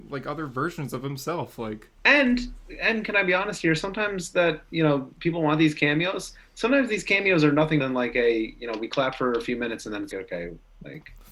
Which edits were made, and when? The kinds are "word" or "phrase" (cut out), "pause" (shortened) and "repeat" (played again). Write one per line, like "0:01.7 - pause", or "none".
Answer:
0:07.8 - word
0:10.1 - word